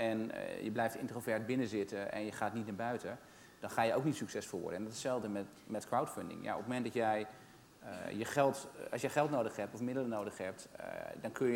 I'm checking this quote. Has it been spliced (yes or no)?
no